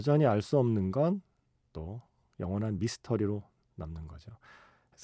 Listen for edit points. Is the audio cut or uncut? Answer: uncut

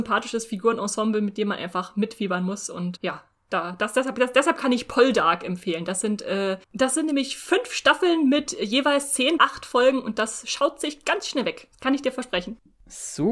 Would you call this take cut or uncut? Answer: cut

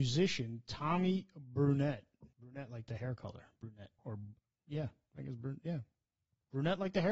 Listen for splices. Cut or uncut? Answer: cut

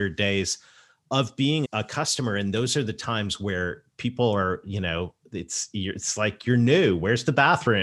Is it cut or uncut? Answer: cut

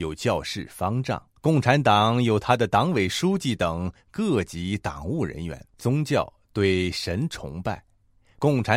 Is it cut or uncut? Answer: cut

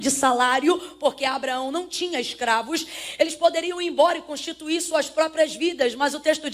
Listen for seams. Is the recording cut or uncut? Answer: uncut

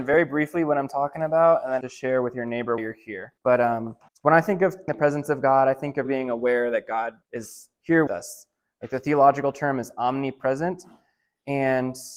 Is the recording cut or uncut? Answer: cut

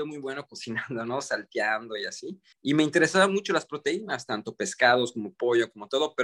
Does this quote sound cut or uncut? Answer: cut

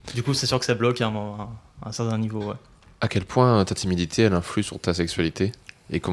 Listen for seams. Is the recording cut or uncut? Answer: uncut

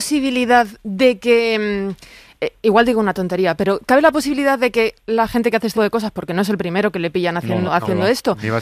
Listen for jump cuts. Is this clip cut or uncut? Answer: cut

